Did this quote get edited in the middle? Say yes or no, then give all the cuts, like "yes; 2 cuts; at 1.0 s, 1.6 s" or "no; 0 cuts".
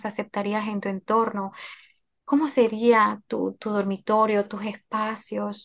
no; 0 cuts